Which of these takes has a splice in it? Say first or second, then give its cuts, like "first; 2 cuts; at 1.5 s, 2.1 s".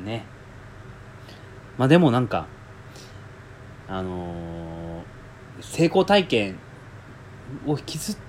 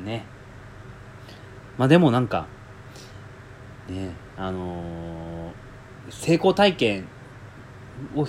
first; 1 cut; at 3.8 s